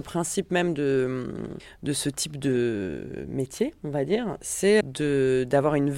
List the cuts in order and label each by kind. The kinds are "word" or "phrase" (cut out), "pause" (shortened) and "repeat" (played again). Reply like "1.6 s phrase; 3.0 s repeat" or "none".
4.8 s word